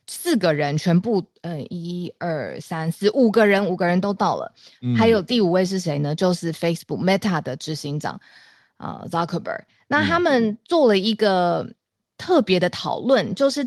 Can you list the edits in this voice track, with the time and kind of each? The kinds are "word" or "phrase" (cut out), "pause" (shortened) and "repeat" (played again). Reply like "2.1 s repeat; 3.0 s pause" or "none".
none